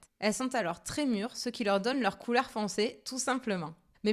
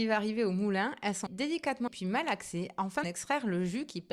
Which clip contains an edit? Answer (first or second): second